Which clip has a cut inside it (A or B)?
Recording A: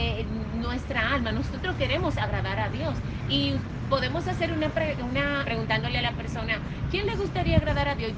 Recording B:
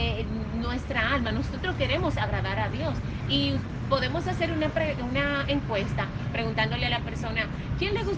A